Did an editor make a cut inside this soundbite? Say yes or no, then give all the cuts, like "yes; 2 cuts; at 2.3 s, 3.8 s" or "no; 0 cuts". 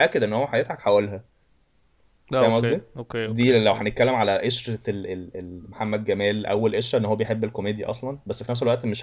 no; 0 cuts